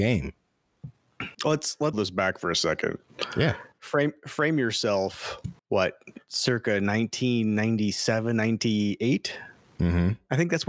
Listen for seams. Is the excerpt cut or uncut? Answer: cut